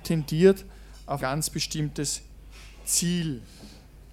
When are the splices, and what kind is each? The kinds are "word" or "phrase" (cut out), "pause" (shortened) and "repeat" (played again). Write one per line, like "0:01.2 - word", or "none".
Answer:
0:01.2 - word